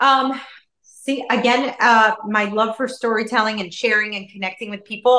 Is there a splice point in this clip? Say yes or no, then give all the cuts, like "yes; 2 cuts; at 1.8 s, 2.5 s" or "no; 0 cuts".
no; 0 cuts